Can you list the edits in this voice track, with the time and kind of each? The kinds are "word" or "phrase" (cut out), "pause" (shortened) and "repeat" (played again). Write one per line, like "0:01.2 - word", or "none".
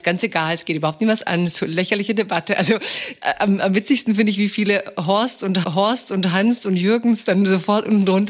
0:05.6 - repeat

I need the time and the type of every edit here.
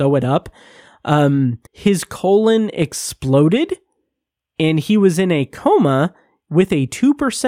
0:01.7 - pause

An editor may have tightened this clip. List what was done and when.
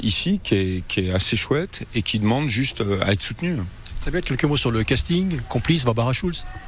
none

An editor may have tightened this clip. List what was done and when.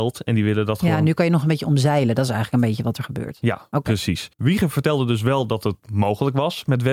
0:04.3 - pause

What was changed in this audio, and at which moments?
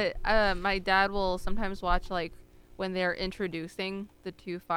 none

